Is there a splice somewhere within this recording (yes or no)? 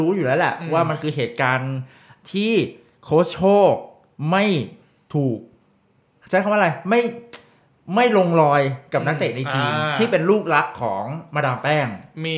no